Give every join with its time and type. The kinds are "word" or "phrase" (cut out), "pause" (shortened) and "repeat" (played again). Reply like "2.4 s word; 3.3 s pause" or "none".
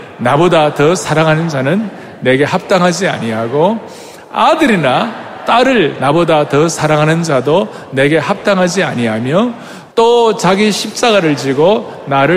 9.9 s pause